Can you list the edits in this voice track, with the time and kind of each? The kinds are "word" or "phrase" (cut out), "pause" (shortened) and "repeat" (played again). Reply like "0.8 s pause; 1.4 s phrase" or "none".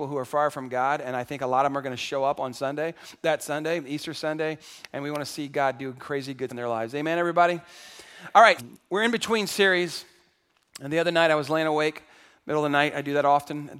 6.5 s word; 8.6 s word